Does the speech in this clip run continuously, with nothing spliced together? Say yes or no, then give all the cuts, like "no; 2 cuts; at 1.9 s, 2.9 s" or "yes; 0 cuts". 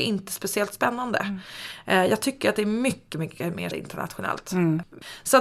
no; 2 cuts; at 3.1 s, 3.7 s